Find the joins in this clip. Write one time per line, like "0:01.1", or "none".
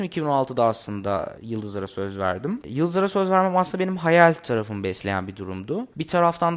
none